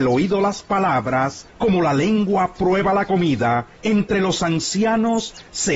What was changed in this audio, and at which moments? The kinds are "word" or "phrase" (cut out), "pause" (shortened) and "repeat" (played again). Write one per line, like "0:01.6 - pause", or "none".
0:01.5 - pause
0:03.7 - pause